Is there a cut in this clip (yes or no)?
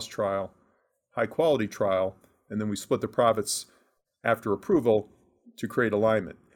no